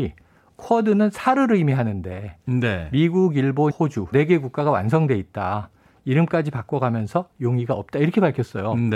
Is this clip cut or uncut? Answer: cut